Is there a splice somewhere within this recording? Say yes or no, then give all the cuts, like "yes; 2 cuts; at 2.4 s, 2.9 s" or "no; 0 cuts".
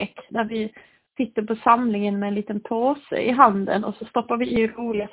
no; 0 cuts